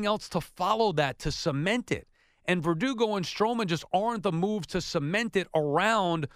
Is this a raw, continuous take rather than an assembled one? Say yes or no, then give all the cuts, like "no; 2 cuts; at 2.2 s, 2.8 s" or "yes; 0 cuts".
yes; 0 cuts